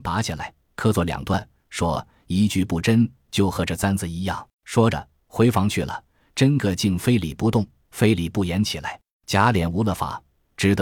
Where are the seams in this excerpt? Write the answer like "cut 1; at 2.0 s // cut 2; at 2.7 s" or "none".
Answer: cut 1; at 4.5 s // cut 2; at 9.1 s